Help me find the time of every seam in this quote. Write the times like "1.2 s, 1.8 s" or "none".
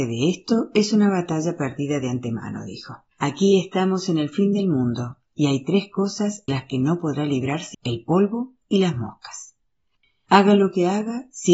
3.1 s, 6.5 s, 7.7 s